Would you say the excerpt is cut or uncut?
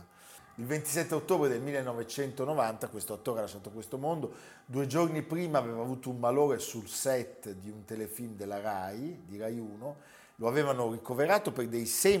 uncut